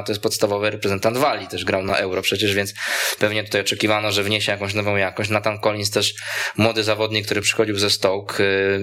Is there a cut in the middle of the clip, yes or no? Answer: no